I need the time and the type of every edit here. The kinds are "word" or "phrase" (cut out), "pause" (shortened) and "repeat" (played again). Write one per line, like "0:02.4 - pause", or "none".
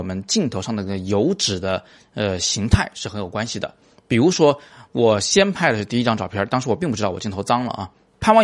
none